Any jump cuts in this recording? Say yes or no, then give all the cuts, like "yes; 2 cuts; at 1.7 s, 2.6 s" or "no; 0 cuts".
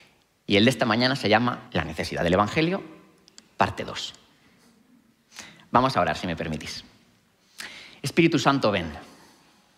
yes; 1 cut; at 1.7 s